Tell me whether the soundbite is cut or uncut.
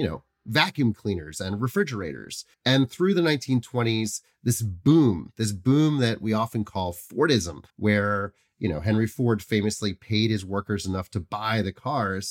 cut